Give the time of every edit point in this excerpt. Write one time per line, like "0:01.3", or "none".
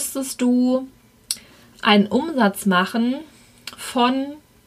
none